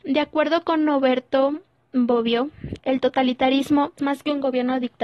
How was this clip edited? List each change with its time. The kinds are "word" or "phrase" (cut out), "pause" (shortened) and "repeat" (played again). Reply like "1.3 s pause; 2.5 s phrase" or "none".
2.8 s word; 4.0 s word